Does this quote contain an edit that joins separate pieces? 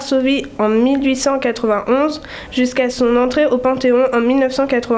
no; 0 cuts

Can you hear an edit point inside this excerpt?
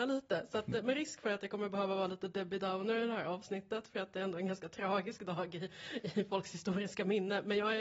no; 0 cuts

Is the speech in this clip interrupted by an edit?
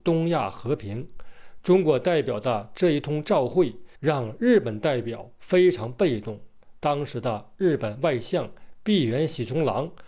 yes; 1 cut; at 4.0 s

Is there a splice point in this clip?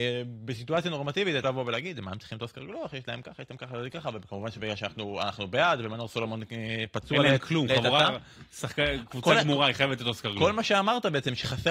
yes; 1 cut; at 1.4 s

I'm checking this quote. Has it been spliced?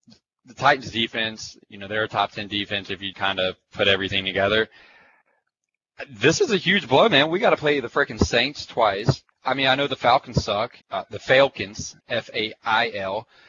yes; 4 cuts; at 3.1 s, 9.3 s, 10.8 s, 12.0 s

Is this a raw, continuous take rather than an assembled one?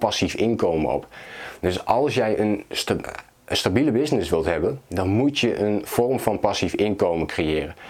yes; 0 cuts

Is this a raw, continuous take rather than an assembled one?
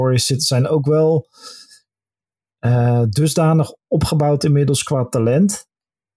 yes; 0 cuts

